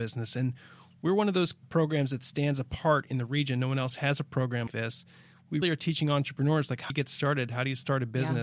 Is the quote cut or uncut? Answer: cut